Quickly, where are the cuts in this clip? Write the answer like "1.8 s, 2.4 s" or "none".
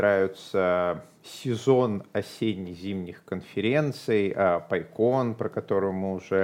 none